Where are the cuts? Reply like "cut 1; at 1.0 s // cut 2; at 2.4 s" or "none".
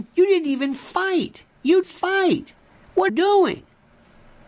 cut 1; at 1.8 s // cut 2; at 3.1 s